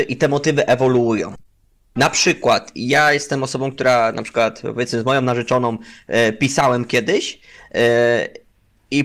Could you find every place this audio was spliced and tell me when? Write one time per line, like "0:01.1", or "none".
none